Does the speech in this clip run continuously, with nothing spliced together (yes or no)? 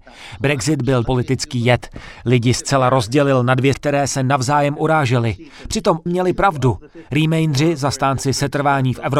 no